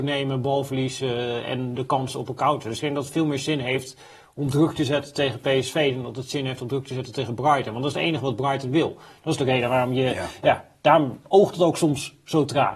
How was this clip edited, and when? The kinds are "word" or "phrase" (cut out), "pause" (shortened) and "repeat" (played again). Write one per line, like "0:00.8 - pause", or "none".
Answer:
none